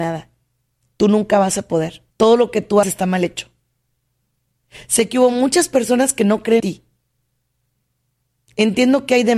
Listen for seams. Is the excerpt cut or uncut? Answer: cut